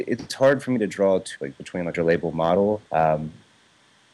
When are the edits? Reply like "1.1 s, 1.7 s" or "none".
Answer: 1.4 s, 1.9 s, 2.9 s